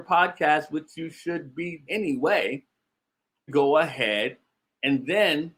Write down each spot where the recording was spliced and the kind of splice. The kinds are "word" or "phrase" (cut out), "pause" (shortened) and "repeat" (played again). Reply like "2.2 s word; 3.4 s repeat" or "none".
1.9 s word; 3.5 s phrase